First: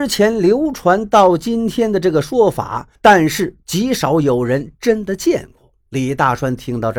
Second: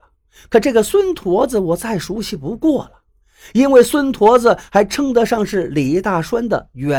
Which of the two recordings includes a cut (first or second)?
first